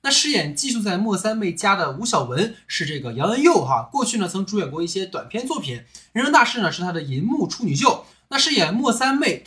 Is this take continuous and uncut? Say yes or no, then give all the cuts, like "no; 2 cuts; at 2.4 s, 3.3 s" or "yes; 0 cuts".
yes; 0 cuts